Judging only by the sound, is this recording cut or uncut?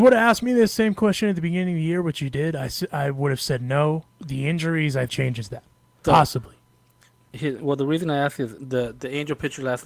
cut